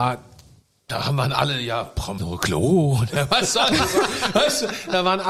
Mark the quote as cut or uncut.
cut